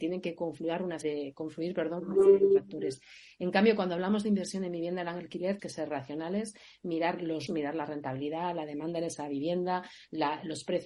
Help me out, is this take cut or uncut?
cut